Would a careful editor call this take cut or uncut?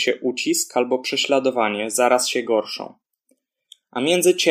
uncut